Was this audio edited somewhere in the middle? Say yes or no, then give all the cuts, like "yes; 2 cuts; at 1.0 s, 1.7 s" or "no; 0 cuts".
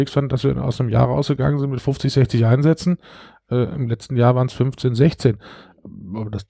no; 0 cuts